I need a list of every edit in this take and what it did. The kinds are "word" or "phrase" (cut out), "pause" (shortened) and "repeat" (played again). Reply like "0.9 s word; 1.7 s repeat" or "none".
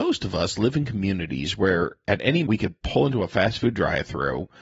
2.4 s word